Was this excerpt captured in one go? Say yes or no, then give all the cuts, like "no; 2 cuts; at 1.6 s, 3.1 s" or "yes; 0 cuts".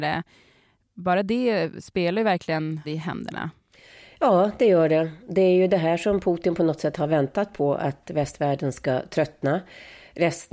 no; 1 cut; at 2.8 s